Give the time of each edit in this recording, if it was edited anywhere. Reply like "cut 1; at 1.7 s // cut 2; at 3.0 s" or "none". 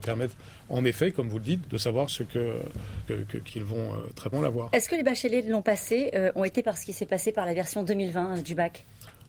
cut 1; at 1.6 s // cut 2; at 2.1 s // cut 3; at 3.1 s // cut 4; at 3.5 s // cut 5; at 4.3 s // cut 6; at 6.6 s